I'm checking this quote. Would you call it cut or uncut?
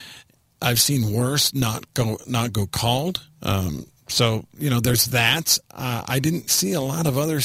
cut